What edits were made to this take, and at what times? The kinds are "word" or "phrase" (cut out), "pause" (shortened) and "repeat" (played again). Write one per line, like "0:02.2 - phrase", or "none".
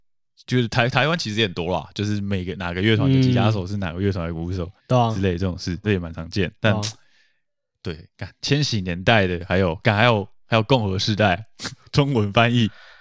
0:04.8 - pause
0:05.8 - word
0:06.6 - pause